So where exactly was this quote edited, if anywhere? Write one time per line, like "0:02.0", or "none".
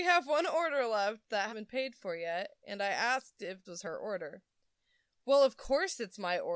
0:01.5
0:03.6